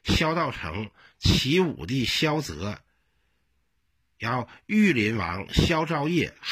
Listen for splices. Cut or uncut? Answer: uncut